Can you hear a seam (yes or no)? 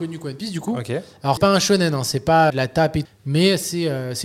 yes